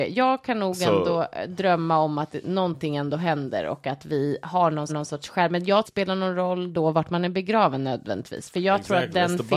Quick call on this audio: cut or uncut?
cut